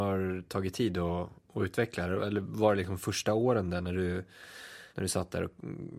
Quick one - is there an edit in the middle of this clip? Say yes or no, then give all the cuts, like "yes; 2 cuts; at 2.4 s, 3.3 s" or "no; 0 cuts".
yes; 1 cut; at 4.9 s